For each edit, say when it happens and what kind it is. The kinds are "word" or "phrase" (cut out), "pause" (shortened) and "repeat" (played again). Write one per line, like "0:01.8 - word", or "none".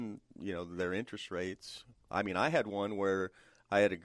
none